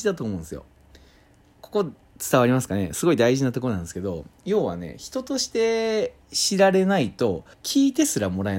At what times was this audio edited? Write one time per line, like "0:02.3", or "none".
0:04.4
0:06.2
0:07.5

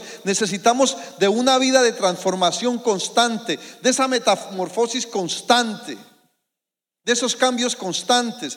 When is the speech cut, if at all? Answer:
none

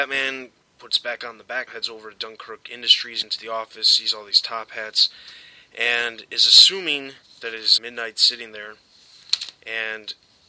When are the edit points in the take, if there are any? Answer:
0:01.7
0:03.2

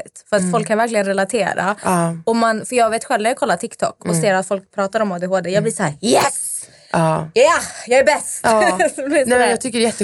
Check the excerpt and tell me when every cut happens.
none

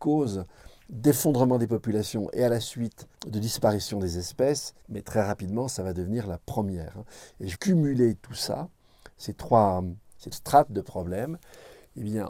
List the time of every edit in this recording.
0:03.1
0:04.8
0:07.5
0:10.3

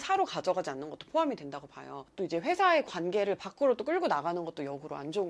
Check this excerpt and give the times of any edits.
none

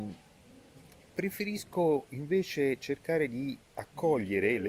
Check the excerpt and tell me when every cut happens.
0:03.6

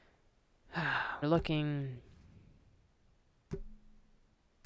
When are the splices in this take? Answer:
0:01.2

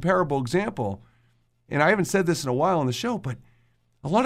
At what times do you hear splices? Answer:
none

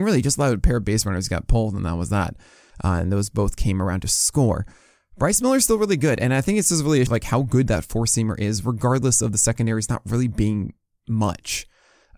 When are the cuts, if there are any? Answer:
0:07.1

